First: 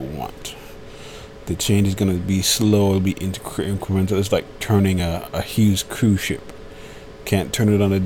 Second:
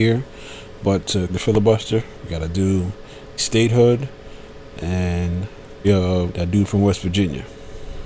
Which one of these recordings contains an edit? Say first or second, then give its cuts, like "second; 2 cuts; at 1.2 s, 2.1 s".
second; 4 cuts; at 1.3 s, 3.4 s, 5.8 s, 6.3 s